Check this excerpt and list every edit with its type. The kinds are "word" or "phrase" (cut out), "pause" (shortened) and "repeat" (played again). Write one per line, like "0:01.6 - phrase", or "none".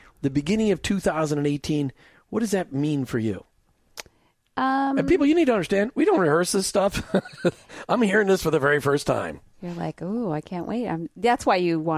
none